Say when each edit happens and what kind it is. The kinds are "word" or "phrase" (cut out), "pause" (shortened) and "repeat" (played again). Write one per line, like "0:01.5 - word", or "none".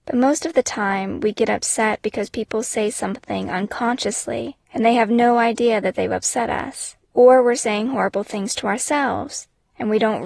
0:04.6 - pause